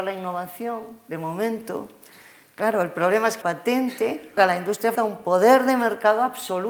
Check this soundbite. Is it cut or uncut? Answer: cut